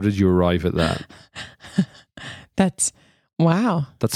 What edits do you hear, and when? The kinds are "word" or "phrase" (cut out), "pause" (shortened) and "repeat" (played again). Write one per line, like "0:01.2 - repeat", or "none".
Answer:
none